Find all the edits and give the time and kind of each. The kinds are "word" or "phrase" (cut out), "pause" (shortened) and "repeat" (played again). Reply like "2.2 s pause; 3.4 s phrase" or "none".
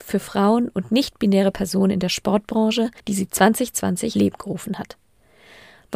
3.0 s pause; 4.1 s word